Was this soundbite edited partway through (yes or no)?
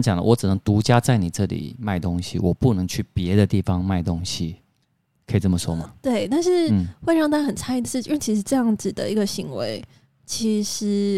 no